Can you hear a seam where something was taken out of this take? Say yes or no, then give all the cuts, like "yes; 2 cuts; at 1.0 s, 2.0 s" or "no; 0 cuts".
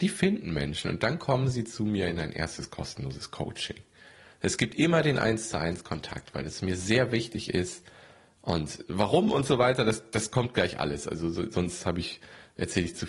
no; 0 cuts